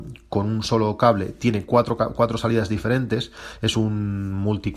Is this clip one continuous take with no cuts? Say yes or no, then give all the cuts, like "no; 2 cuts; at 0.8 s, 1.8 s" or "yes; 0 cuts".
yes; 0 cuts